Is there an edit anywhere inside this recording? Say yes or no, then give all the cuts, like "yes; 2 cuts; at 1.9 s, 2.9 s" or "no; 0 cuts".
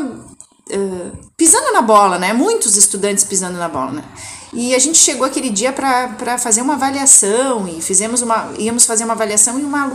yes; 1 cut; at 1.3 s